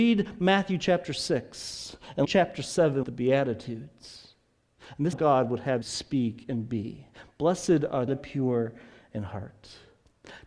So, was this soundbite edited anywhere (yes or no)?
yes